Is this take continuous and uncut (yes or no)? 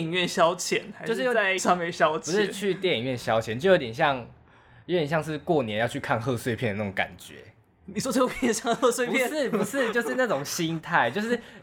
no